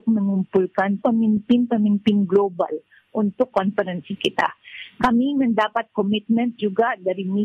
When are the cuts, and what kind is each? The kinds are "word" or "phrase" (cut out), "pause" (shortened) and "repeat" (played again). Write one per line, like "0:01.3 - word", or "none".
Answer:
0:01.0 - word
0:03.5 - phrase